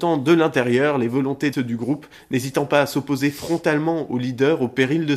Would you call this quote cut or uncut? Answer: cut